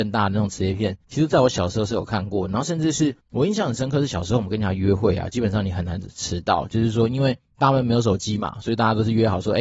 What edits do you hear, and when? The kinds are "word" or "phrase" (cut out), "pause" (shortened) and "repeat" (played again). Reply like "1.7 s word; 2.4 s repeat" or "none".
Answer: 1.0 s pause; 3.2 s pause; 7.5 s pause